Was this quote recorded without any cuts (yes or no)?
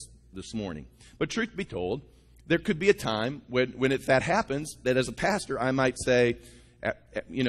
yes